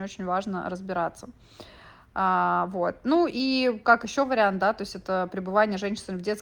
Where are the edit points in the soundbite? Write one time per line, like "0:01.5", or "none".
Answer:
none